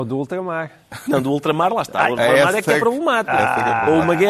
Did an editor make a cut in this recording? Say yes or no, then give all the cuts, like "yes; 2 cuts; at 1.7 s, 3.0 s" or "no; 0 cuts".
no; 0 cuts